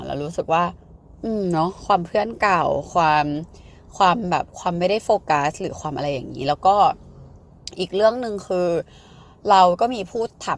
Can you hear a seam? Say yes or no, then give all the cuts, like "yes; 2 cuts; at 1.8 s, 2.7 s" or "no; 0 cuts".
no; 0 cuts